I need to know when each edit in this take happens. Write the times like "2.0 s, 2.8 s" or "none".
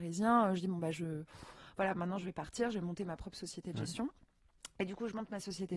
none